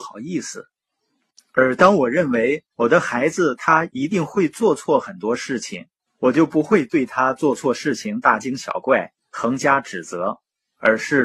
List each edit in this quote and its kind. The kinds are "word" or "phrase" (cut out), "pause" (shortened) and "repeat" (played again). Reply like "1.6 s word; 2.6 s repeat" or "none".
2.7 s pause; 6.1 s pause; 9.2 s pause

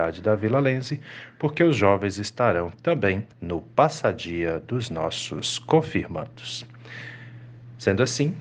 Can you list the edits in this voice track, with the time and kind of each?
3.3 s pause

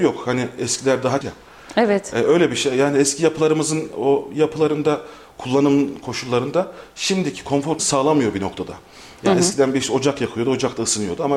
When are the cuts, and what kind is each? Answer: 1.2 s word; 7.8 s word

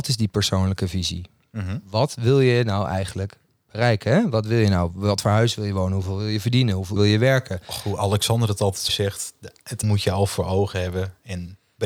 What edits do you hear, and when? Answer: 7.0 s word; 8.9 s word; 9.8 s word

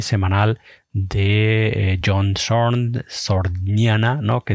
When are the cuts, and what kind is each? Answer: none

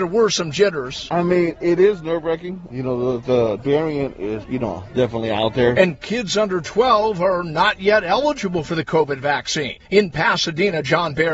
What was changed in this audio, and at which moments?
3.6 s word

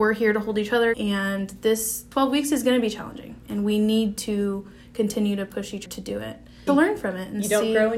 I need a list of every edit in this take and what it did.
0.9 s word; 2.1 s word; 5.9 s word; 6.7 s word

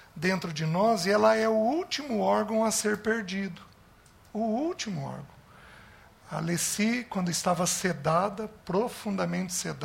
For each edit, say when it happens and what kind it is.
none

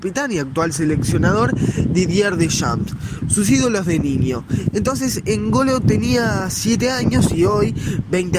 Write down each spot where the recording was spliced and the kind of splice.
none

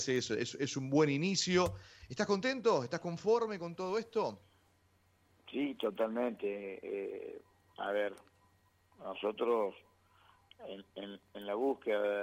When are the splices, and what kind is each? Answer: none

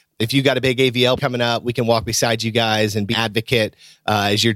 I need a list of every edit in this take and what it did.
1.2 s word; 3.1 s word

